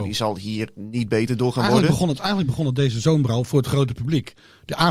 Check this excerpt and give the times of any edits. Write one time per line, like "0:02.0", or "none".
none